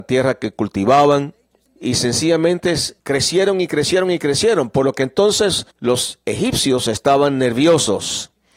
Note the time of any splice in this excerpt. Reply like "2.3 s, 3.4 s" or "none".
1.7 s, 3.0 s, 5.7 s